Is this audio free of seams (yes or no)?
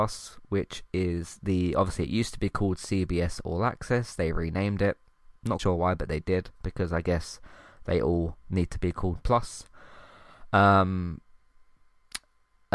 no